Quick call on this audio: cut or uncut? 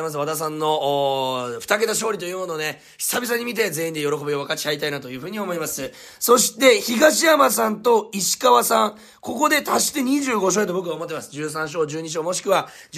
uncut